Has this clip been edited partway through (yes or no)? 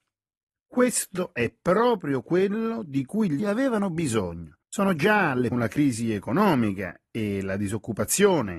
yes